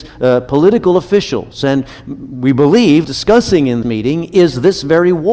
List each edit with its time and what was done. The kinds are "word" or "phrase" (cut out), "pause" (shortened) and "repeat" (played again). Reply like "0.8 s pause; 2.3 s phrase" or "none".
3.0 s phrase; 3.8 s word